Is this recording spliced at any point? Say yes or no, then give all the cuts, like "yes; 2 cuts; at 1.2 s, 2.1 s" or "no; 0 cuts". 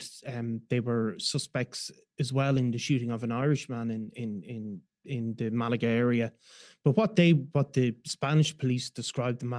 no; 0 cuts